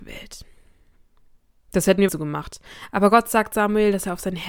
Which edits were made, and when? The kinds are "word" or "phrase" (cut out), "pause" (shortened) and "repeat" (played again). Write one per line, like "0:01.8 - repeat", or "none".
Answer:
0:02.1 - phrase